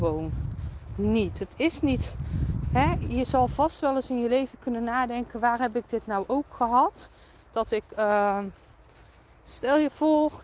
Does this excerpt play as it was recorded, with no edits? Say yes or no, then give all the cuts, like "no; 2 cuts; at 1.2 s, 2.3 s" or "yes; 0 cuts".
yes; 0 cuts